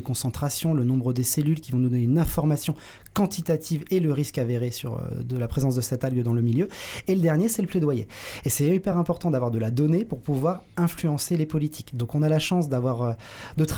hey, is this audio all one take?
yes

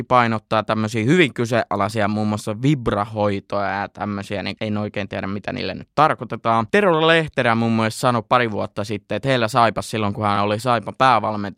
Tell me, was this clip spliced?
no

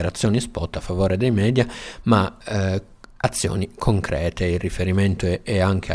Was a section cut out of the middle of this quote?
no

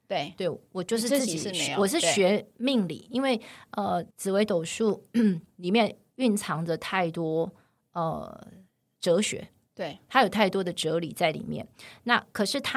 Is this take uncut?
no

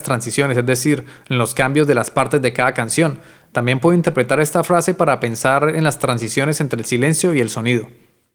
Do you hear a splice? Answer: no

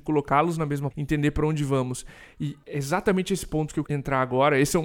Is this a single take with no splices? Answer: no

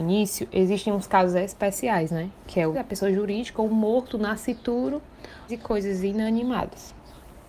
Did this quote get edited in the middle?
yes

